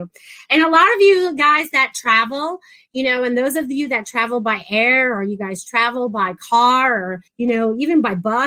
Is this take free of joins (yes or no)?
no